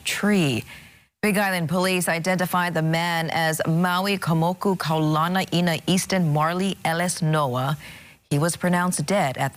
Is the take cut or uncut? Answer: uncut